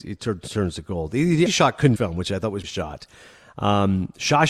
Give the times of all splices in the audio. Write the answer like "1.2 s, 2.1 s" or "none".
1.5 s, 2.0 s, 2.6 s